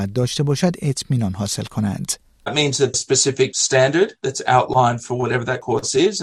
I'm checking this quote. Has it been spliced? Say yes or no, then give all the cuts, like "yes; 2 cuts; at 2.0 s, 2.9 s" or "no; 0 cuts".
yes; 1 cut; at 2.9 s